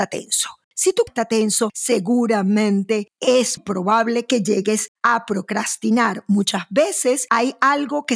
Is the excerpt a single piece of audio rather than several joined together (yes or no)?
no